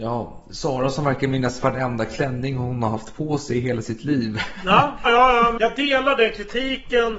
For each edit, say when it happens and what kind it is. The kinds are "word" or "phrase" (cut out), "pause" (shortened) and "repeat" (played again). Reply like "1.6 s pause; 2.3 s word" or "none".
5.1 s word; 5.6 s word